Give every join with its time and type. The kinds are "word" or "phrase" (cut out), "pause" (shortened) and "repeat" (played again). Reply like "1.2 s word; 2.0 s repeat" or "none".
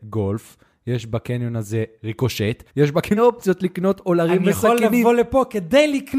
2.7 s pause; 3.2 s phrase